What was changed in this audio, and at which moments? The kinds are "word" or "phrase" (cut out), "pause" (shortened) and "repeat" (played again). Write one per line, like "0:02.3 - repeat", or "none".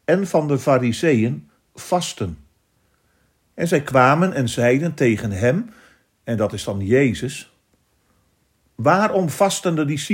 none